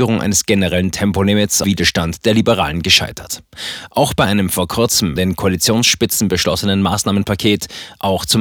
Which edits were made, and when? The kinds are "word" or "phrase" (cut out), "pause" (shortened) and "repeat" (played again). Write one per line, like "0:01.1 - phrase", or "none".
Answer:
0:01.6 - phrase
0:05.2 - word